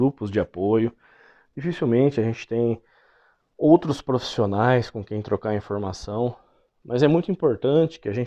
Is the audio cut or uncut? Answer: uncut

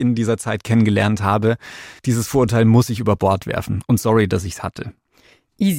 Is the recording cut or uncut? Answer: cut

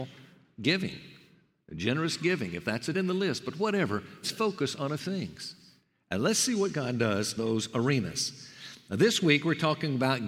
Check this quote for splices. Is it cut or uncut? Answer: cut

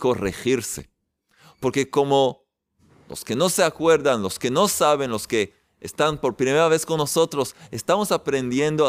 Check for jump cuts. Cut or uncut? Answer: uncut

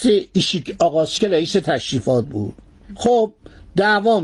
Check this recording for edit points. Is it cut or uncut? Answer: cut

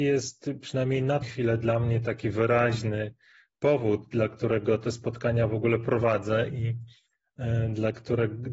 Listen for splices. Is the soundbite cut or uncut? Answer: cut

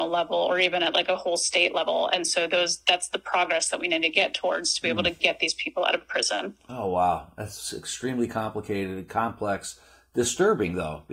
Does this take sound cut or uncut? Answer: uncut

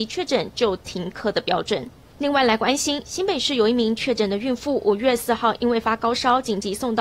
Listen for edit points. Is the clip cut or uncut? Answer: cut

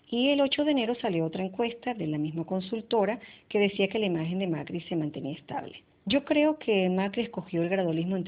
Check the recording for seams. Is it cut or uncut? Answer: cut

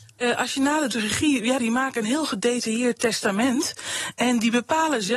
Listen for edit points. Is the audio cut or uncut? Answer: cut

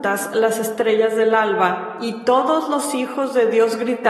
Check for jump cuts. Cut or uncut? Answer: uncut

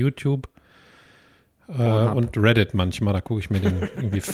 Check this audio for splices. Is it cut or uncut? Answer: uncut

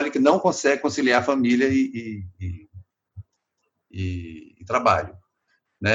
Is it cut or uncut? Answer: uncut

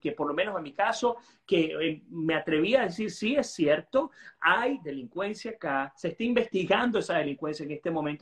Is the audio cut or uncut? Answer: uncut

